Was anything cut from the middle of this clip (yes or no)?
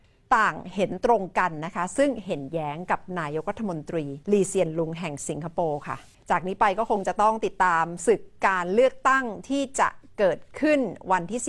yes